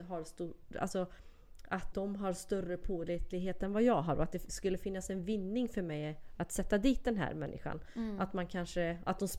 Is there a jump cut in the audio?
yes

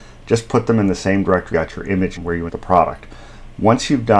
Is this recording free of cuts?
no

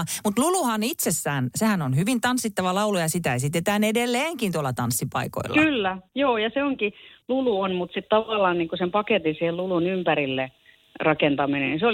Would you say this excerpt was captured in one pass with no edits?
yes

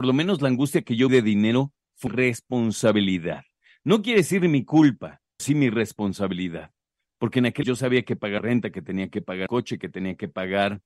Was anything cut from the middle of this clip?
yes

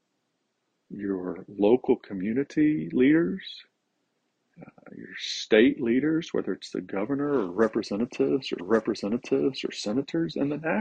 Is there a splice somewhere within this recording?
yes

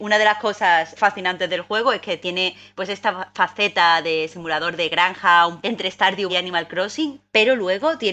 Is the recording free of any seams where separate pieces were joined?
no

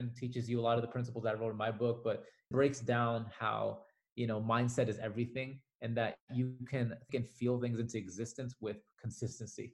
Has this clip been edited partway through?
yes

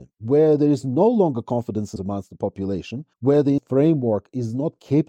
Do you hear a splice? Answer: yes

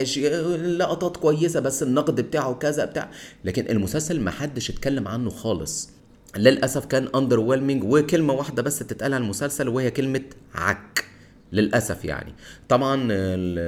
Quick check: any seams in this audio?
no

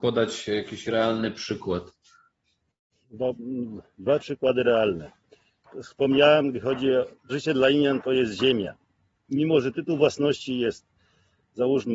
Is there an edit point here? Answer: yes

